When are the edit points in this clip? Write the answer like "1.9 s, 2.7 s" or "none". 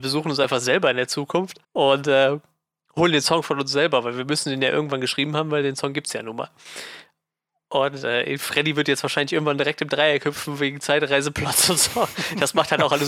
1.6 s